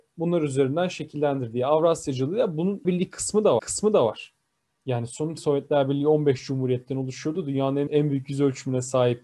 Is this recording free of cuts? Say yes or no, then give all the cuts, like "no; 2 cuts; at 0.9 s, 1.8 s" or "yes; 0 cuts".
no; 4 cuts; at 2.8 s, 3.6 s, 5.4 s, 7.9 s